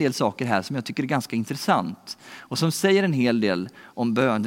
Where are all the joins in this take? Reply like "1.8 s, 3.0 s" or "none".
none